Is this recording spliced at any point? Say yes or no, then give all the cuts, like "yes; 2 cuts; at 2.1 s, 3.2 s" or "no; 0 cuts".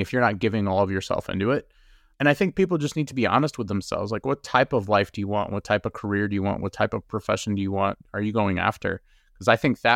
no; 0 cuts